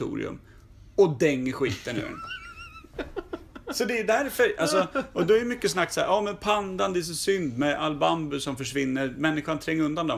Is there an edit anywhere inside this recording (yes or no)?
no